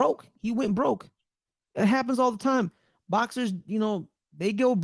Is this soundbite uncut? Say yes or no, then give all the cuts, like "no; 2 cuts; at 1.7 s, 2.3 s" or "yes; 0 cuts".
yes; 0 cuts